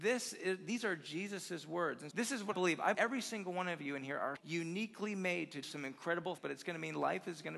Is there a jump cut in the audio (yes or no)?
yes